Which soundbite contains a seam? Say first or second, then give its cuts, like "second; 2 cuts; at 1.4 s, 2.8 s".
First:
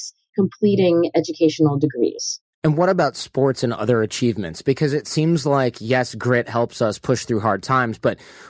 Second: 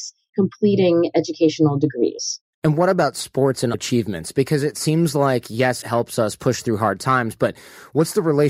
second; 2 cuts; at 3.7 s, 5.8 s